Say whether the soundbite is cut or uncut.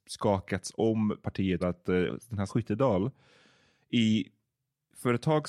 cut